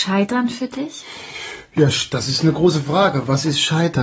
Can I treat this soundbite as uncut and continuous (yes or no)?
yes